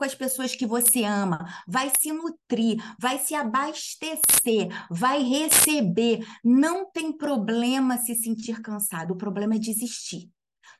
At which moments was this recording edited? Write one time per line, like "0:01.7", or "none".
none